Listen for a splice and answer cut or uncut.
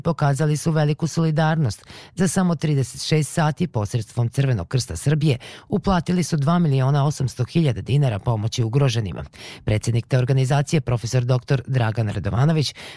uncut